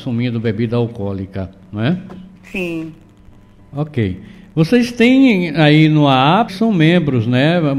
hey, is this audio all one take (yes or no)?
no